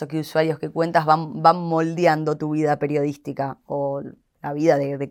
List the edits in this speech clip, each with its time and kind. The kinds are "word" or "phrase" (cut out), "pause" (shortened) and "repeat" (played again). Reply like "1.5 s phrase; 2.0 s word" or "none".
none

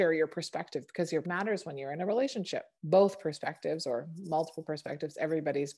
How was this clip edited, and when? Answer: 1.2 s word; 2.8 s pause

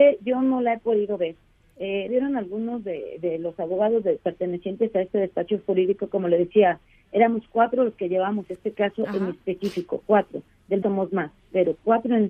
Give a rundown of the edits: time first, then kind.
2.1 s word; 10.8 s word

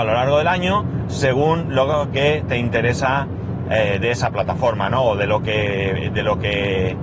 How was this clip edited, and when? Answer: none

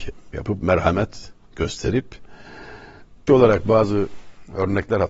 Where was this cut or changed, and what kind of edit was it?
3.3 s word

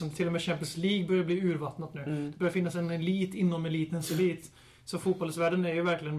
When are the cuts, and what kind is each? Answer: none

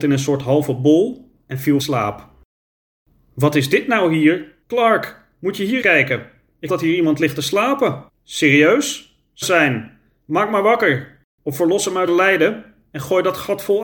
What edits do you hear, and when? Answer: 1.4 s pause; 1.8 s phrase; 4.6 s pause; 5.8 s word; 6.7 s word; 8.1 s pause; 9.4 s phrase; 12.1 s word

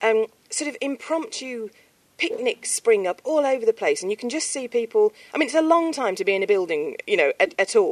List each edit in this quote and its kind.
none

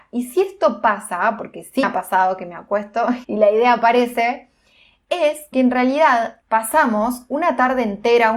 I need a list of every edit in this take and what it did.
1.8 s word; 3.2 s word; 5.5 s word; 6.4 s word

